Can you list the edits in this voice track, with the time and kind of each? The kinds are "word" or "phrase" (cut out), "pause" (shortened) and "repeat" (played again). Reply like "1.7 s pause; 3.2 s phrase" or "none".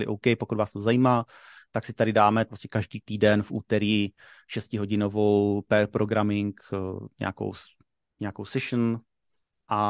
2.5 s word